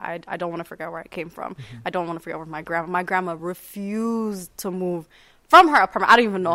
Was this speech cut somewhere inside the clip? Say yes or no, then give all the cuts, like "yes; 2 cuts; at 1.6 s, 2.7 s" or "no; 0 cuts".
no; 0 cuts